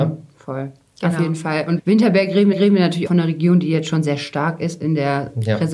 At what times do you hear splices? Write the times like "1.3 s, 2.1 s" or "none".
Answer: 1.8 s, 2.5 s, 3.1 s